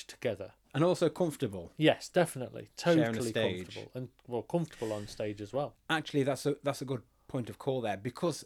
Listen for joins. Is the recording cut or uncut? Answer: uncut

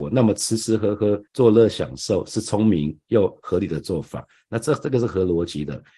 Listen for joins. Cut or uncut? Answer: cut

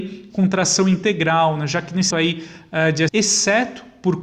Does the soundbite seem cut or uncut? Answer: cut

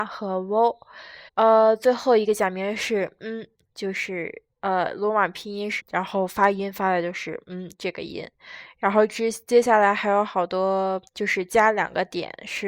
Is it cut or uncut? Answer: cut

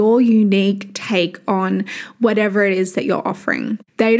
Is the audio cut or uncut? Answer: uncut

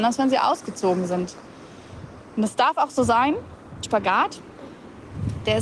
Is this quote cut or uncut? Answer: cut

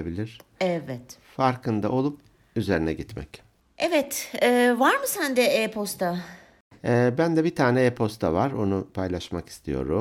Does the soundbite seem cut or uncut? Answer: uncut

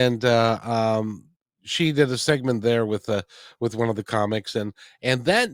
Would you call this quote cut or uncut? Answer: uncut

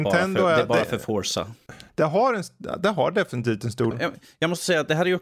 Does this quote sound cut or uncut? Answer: cut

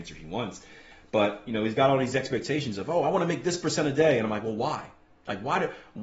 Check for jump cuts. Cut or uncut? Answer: uncut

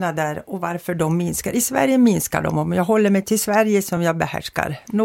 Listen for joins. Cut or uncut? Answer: uncut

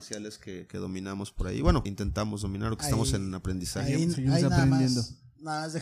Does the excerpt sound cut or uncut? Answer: cut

